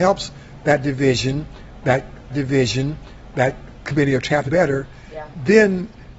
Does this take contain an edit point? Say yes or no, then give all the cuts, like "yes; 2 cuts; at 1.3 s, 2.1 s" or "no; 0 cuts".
yes; 2 cuts; at 2.3 s, 4.5 s